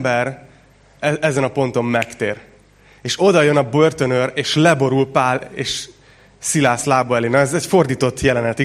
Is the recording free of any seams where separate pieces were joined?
yes; 0 cuts

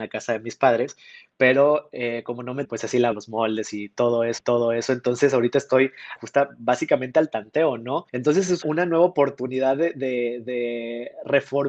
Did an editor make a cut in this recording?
yes; 6 cuts; at 2.6 s, 3.1 s, 4.4 s, 6.2 s, 8.1 s, 8.6 s

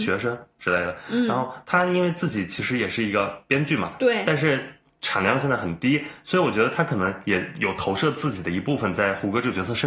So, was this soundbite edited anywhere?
no; 0 cuts

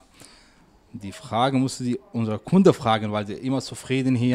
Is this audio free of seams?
yes; 0 cuts

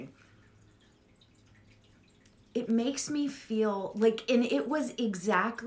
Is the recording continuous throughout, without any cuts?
yes; 0 cuts

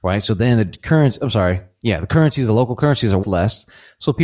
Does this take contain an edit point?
yes; 1 cut; at 3.2 s

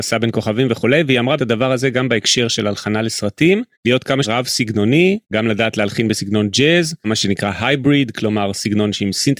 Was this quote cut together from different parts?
yes; 5 cuts; at 1.4 s, 3.7 s, 4.2 s, 5.2 s, 7.0 s

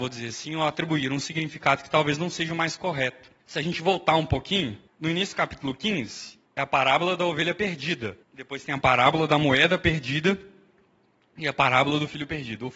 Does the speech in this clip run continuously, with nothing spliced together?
no; 4 cuts; at 3.4 s, 4.9 s, 6.4 s, 8.2 s

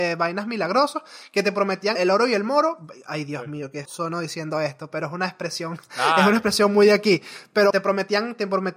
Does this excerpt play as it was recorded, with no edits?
no; 3 cuts; at 2.0 s, 3.9 s, 7.7 s

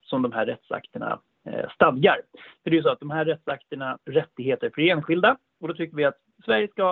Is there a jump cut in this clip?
yes; 1 cut; at 4.0 s

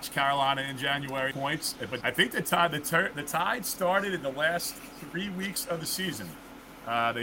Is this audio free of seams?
no; 2 cuts; at 1.3 s, 2.0 s

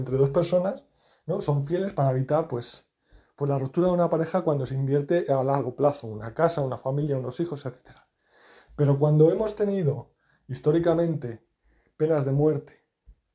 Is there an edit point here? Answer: no; 0 cuts

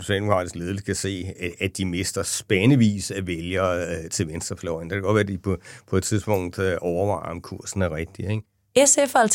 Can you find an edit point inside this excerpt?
yes; 1 cut; at 1.4 s

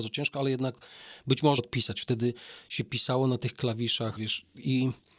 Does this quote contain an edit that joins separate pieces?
yes; 2 cuts; at 1.6 s, 4.2 s

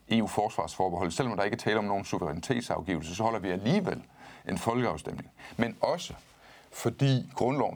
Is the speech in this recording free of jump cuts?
yes; 0 cuts

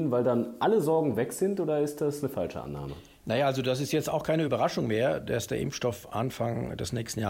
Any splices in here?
no; 0 cuts

